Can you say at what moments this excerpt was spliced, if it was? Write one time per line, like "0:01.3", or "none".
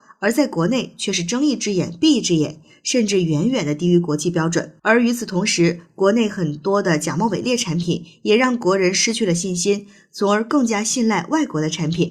0:04.8